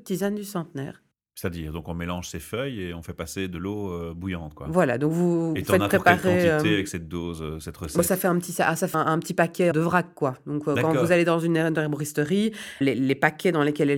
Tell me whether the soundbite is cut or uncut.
cut